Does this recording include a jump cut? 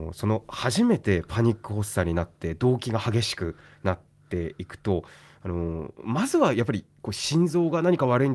no; 0 cuts

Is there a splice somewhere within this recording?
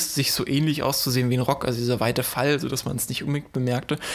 no; 0 cuts

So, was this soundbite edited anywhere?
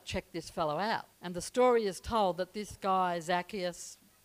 yes; 1 cut; at 1.1 s

